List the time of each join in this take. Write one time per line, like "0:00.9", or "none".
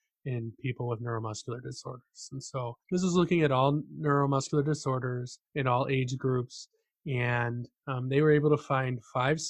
0:02.8
0:05.4
0:07.8